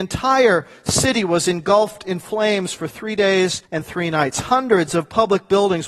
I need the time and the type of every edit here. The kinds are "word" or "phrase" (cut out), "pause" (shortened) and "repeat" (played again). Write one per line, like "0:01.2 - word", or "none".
0:03.7 - pause
0:04.9 - phrase